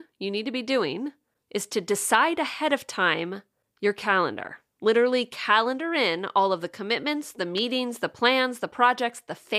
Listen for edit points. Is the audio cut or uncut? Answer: uncut